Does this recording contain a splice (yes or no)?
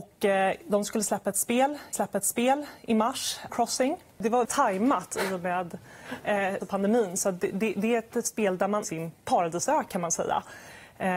yes